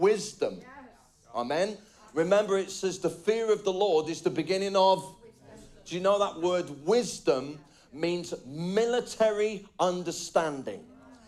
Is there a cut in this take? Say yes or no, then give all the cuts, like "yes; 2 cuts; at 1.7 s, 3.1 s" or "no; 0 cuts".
no; 0 cuts